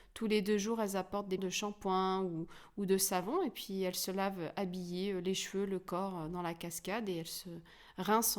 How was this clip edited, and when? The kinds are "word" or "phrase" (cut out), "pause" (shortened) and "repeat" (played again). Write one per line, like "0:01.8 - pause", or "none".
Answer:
0:01.4 - phrase